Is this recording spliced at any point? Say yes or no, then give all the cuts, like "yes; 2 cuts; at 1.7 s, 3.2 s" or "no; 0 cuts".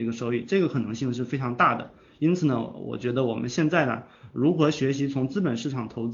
no; 0 cuts